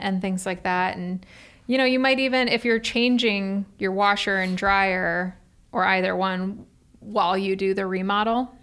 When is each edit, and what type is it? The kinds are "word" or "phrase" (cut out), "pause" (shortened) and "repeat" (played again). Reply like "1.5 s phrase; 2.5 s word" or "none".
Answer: none